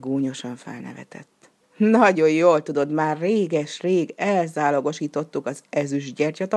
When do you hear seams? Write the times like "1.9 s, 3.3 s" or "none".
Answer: 1.6 s